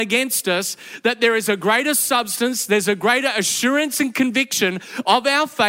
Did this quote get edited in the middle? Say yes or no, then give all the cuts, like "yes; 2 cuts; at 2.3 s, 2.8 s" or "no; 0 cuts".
no; 0 cuts